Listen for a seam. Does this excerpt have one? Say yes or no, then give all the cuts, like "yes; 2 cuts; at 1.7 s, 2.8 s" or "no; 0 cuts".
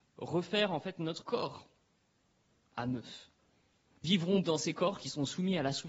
yes; 3 cuts; at 1.2 s, 4.0 s, 4.4 s